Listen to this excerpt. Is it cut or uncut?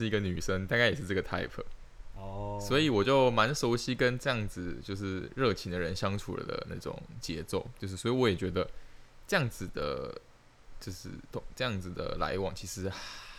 uncut